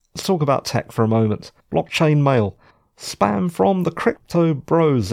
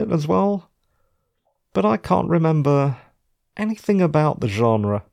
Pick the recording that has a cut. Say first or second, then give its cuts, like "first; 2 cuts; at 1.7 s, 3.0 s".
first; 2 cuts; at 1.6 s, 2.7 s